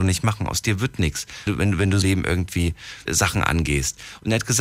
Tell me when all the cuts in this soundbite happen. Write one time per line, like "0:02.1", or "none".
0:01.5
0:02.0
0:03.1